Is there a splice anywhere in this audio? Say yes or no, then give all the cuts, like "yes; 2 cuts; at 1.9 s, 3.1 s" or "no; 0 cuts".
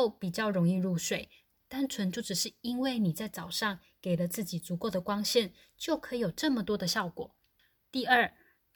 no; 0 cuts